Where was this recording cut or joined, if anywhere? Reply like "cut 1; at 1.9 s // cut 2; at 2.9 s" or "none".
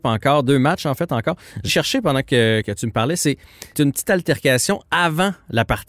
cut 1; at 1.7 s // cut 2; at 2.6 s // cut 3; at 3.7 s